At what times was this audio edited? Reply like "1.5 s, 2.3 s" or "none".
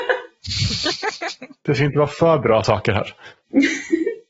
none